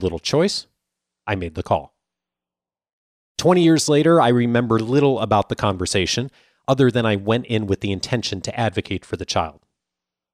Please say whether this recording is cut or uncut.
uncut